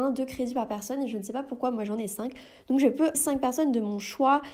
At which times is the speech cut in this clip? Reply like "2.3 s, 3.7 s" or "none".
3.1 s